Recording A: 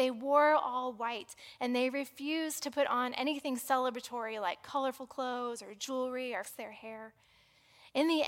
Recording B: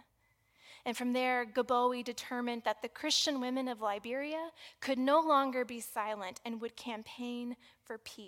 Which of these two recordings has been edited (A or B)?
A